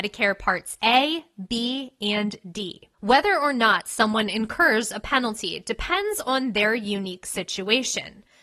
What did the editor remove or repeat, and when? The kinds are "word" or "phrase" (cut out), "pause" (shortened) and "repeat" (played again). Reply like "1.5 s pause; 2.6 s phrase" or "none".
2.9 s pause